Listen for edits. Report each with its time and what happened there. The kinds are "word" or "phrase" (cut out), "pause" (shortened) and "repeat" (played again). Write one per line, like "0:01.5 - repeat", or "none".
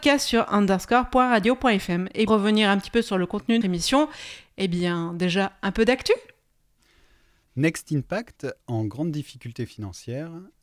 0:02.3 - word
0:03.6 - word